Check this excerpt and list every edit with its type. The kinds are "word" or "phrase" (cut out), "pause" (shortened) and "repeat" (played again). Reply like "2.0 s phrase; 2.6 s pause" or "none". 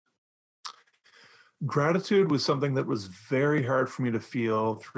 none